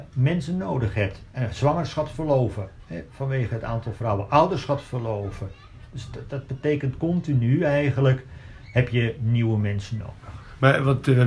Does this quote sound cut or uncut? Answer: uncut